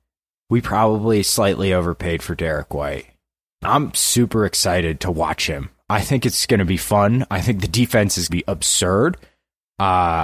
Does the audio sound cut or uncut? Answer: cut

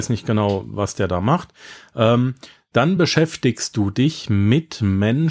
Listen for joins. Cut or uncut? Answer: uncut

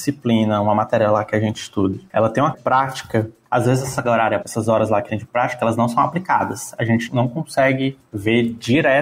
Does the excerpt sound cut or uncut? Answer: cut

